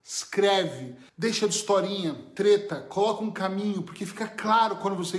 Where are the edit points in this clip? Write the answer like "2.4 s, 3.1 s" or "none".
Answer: 1.1 s